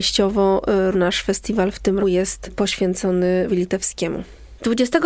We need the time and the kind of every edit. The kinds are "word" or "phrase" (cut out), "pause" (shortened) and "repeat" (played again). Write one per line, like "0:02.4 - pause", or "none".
0:00.9 - word
0:02.0 - word
0:03.5 - word